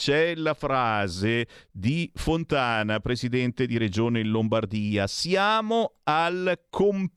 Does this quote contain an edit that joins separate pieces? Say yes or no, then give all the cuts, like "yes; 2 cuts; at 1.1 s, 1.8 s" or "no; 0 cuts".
no; 0 cuts